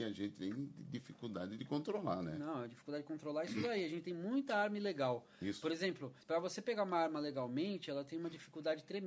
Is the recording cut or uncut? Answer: cut